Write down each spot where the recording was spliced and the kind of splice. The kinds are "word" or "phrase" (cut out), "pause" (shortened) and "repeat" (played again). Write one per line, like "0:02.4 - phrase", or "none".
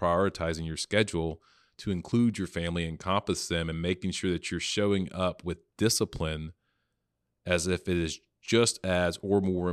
none